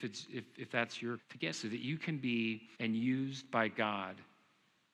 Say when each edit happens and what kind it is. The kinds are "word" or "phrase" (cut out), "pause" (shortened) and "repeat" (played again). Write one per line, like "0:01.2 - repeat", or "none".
0:01.2 - word
0:01.5 - word
0:02.7 - word

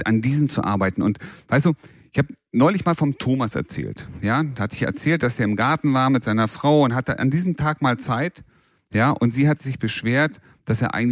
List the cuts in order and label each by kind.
none

